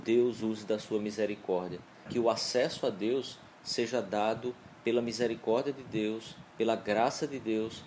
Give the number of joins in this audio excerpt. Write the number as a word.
two